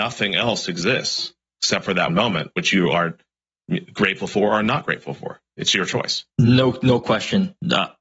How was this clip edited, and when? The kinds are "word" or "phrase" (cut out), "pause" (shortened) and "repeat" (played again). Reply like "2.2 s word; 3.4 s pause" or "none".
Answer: 2.1 s word; 6.3 s pause